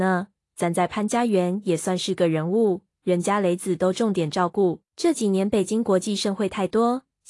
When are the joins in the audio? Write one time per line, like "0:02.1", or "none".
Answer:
0:04.9

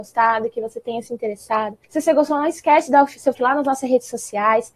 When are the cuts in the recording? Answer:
0:01.8
0:03.3

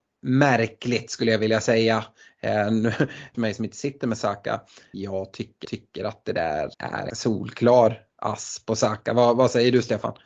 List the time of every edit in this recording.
0:03.3
0:04.9
0:05.6
0:06.7
0:07.1

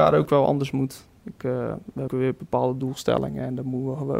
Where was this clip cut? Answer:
0:02.1

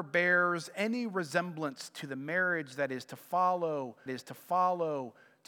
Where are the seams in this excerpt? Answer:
0:04.1

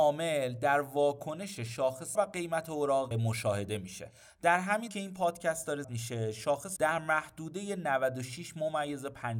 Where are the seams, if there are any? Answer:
0:02.1
0:03.1
0:04.9
0:05.8
0:06.8

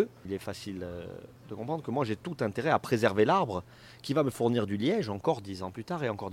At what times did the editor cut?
none

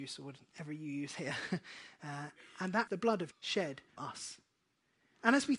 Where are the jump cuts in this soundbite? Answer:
0:02.9
0:03.3
0:04.0

